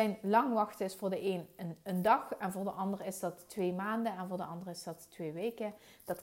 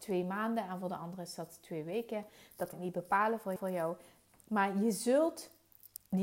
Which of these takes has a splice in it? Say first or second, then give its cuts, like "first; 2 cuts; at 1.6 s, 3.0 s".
second; 2 cuts; at 2.7 s, 3.6 s